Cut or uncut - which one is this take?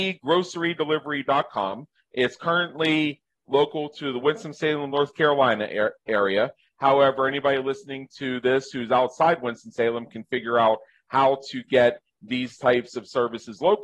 uncut